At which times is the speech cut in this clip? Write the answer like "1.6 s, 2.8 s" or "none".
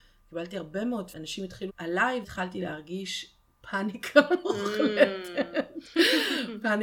1.1 s, 1.7 s, 2.2 s